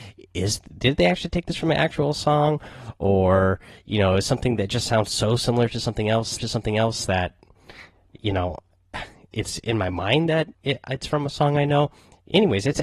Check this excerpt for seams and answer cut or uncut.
cut